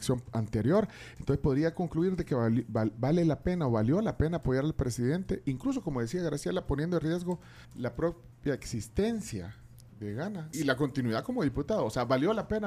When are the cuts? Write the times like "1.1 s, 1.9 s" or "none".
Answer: 7.6 s, 9.9 s, 10.5 s